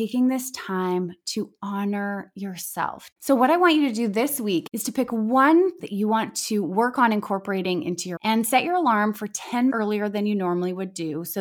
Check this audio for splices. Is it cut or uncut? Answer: cut